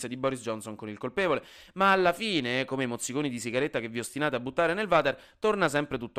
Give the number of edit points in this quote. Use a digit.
0